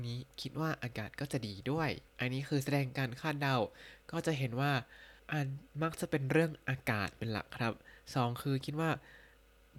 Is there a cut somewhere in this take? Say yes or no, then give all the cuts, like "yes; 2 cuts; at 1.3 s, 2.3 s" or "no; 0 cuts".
yes; 2 cuts; at 2.1 s, 5.2 s